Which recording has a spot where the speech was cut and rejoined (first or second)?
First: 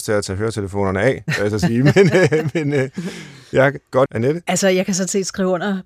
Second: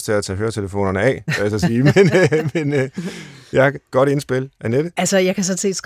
first